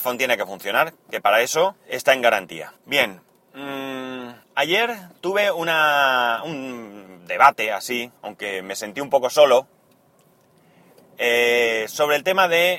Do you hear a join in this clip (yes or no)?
yes